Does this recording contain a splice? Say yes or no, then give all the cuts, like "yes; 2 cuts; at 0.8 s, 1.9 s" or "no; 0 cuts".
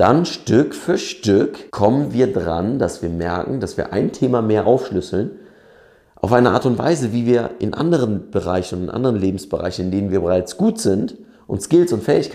yes; 1 cut; at 1.7 s